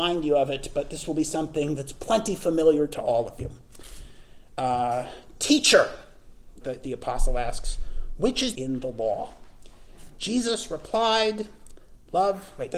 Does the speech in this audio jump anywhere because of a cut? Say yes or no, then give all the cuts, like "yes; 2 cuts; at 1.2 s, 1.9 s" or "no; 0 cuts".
yes; 2 cuts; at 6.6 s, 8.5 s